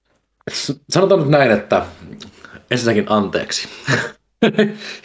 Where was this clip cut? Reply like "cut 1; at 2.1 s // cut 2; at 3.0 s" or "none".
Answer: none